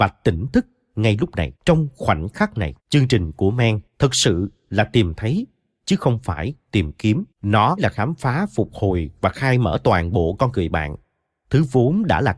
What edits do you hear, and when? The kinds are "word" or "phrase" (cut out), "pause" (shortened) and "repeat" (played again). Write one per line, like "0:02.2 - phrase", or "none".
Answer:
0:01.6 - pause
0:02.8 - pause
0:03.9 - pause
0:07.3 - pause